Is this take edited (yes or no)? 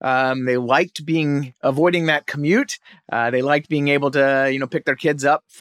no